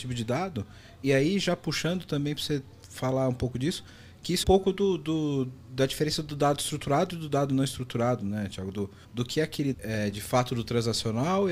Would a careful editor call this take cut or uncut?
cut